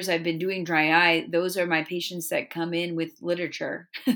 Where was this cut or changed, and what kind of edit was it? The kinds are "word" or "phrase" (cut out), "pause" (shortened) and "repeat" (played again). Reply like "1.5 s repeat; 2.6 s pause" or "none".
none